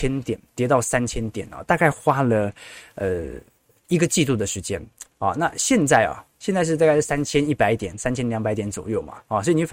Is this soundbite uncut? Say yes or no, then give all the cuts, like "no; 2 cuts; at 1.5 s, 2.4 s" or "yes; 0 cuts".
yes; 0 cuts